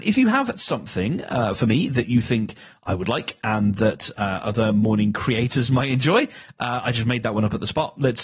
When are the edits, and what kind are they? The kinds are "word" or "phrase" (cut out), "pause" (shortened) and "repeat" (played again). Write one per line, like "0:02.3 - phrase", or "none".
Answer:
none